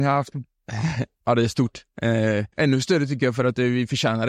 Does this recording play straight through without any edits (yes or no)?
no